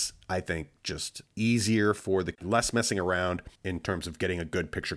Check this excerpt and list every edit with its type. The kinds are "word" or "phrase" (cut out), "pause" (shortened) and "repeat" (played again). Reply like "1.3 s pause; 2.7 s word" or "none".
1.3 s pause; 2.3 s word; 3.5 s pause